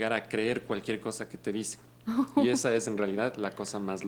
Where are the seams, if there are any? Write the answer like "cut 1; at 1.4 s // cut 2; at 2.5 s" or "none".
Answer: none

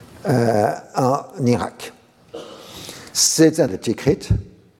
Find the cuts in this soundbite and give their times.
cut 1; at 3.7 s

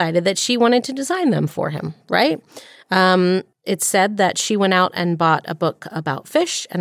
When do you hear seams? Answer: cut 1; at 3.5 s

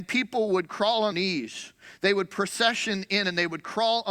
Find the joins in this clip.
cut 1; at 1.1 s

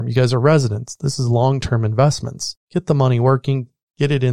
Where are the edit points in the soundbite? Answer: cut 1; at 2.6 s

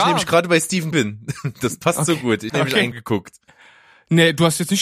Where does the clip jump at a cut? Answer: cut 1; at 0.9 s // cut 2; at 2.5 s // cut 3; at 2.9 s

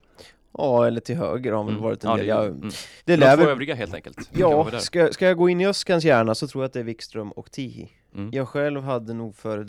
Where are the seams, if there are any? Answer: cut 1; at 3.0 s

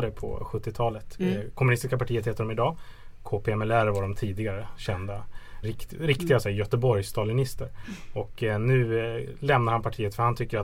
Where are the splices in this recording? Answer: cut 1; at 5.6 s

